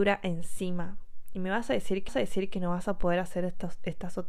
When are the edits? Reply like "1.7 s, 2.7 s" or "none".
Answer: 2.1 s